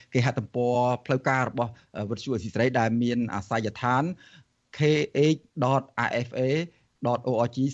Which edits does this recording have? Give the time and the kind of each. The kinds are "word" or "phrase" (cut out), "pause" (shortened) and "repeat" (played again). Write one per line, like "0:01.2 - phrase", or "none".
0:05.5 - pause